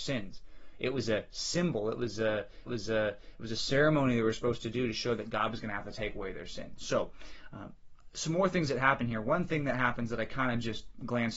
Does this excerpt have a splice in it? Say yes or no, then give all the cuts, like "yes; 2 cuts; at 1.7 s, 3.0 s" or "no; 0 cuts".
yes; 1 cut; at 2.7 s